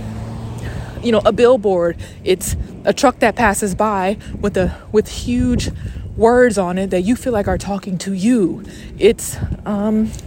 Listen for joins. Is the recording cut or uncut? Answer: uncut